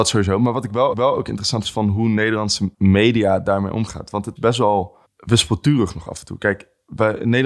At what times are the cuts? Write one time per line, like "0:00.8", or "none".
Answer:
0:00.9
0:01.6
0:02.7
0:04.4
0:05.0